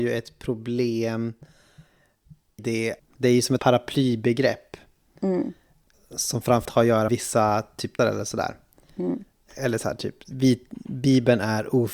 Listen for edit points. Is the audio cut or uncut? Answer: cut